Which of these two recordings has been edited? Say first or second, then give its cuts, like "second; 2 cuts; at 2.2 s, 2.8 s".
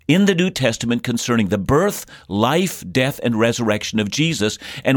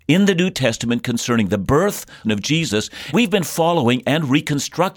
second; 2 cuts; at 2.2 s, 3.1 s